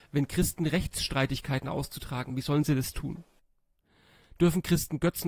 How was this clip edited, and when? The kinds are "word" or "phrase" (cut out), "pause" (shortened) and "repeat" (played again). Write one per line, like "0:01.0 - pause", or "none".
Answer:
0:02.3 - word